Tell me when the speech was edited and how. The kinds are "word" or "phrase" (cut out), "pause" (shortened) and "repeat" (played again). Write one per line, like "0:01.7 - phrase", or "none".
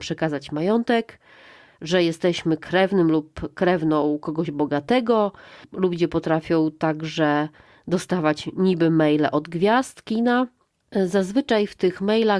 none